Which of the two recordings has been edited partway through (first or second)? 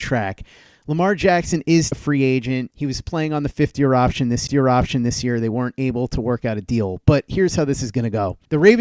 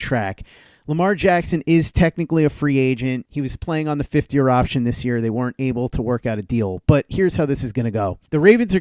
first